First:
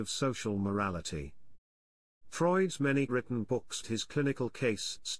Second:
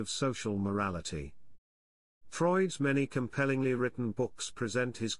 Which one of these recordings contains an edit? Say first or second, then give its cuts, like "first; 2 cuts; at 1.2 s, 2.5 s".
first; 2 cuts; at 3.1 s, 3.8 s